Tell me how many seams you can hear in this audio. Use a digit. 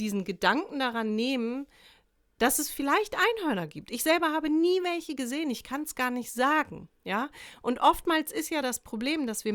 0